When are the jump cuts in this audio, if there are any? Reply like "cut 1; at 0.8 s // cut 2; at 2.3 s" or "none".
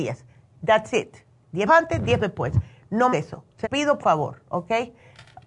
cut 1; at 1.7 s // cut 2; at 2.2 s // cut 3; at 3.1 s // cut 4; at 3.6 s // cut 5; at 4.0 s